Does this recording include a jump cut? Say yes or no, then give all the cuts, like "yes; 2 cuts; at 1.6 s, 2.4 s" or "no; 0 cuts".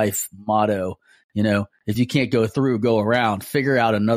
no; 0 cuts